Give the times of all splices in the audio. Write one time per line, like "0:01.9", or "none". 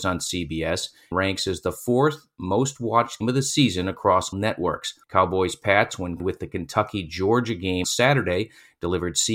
0:01.1
0:03.2
0:04.3
0:05.0
0:06.2
0:07.8